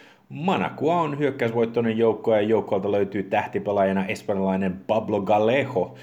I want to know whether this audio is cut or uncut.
uncut